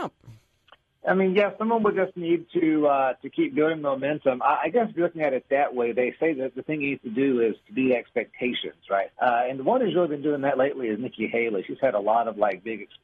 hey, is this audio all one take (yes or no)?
no